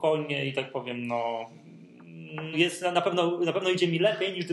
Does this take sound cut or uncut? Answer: cut